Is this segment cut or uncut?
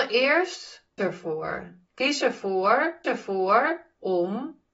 cut